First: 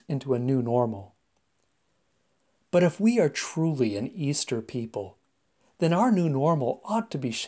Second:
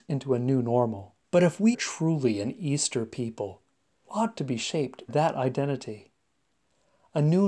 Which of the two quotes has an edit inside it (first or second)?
second